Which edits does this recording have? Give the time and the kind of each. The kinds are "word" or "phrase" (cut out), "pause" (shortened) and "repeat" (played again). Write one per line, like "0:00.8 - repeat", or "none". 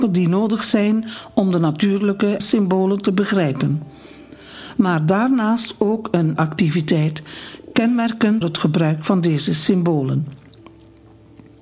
0:02.4 - phrase
0:06.4 - word
0:08.4 - word